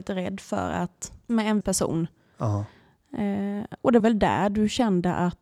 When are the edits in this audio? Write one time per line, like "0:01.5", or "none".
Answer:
0:01.3
0:01.6
0:04.0